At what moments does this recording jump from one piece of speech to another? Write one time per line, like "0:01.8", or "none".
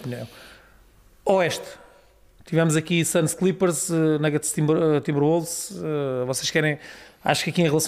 none